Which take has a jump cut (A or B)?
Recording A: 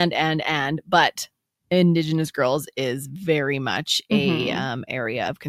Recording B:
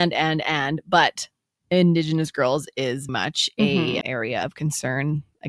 B